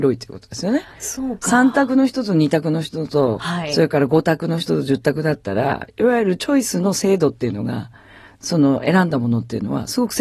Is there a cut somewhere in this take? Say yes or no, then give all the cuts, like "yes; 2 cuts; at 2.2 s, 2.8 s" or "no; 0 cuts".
no; 0 cuts